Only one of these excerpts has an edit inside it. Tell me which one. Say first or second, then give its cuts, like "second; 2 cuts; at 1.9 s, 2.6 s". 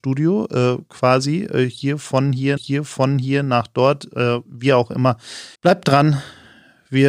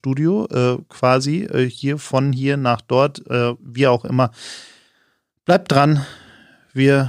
first; 2 cuts; at 2.6 s, 5.5 s